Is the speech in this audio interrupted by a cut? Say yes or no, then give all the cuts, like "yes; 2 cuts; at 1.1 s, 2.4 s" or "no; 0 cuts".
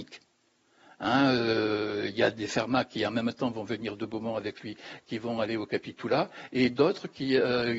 no; 0 cuts